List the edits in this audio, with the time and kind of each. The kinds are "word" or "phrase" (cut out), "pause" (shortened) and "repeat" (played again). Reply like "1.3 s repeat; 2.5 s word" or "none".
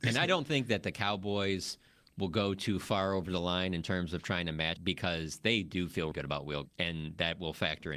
4.8 s word; 6.1 s word; 6.7 s word